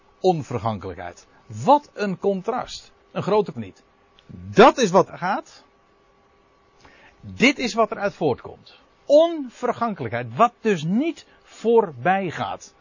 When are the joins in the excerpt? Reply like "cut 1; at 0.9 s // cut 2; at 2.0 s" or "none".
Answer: cut 1; at 3.0 s // cut 2; at 3.5 s // cut 3; at 4.1 s // cut 4; at 5.1 s // cut 5; at 8.9 s